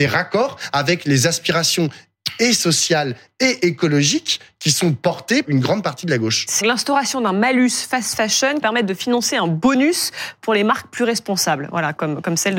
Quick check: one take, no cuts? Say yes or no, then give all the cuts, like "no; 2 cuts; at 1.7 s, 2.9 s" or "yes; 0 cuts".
no; 3 cuts; at 5.4 s, 6.6 s, 8.6 s